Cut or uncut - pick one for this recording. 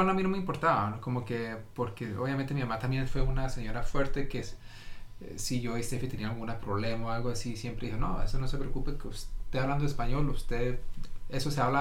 cut